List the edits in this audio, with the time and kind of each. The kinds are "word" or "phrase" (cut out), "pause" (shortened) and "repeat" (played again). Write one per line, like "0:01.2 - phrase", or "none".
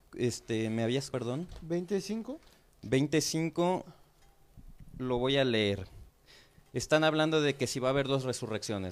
0:01.1 - word